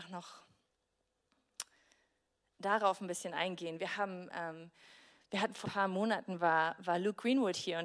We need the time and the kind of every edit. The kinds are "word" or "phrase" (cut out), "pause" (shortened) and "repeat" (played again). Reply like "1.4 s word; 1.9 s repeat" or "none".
5.6 s word